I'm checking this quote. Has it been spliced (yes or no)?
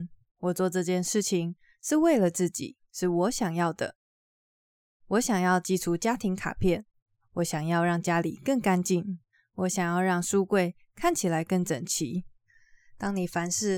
no